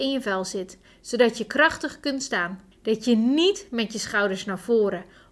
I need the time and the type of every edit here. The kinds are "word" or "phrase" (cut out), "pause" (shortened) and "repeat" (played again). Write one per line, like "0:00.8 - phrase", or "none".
0:02.7 - pause